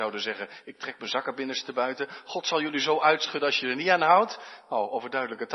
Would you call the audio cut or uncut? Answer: uncut